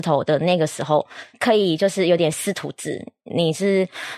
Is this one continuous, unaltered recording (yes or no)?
no